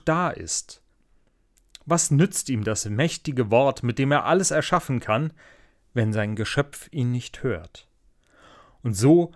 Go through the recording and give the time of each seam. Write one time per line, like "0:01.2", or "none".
none